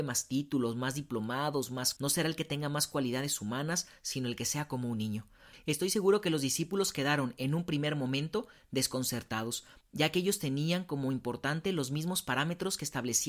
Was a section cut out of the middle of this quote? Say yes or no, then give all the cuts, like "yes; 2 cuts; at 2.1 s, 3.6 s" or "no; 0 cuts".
yes; 1 cut; at 2.0 s